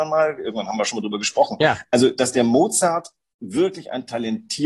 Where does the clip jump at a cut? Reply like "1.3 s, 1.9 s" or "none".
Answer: none